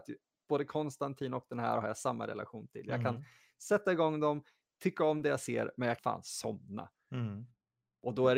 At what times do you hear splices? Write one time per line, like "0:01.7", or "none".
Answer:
0:06.0